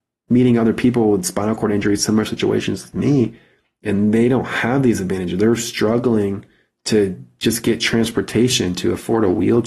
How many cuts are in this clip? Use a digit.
0